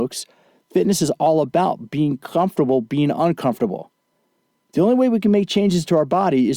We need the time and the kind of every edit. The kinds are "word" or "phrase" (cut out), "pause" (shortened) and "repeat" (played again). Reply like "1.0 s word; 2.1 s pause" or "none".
none